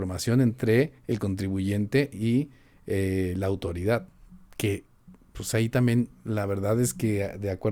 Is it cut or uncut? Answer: uncut